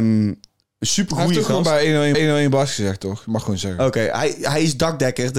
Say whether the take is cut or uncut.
cut